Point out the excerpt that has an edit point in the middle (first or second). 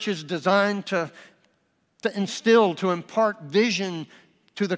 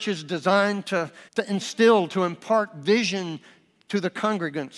second